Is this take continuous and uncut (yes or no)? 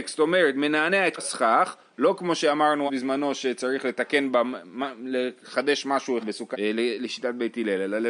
no